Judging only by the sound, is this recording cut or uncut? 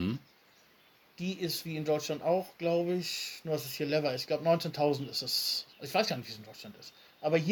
cut